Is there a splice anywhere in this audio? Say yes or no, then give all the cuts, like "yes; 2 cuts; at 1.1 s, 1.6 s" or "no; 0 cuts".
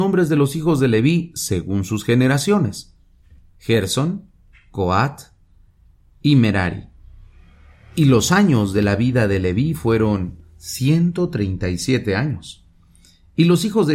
no; 0 cuts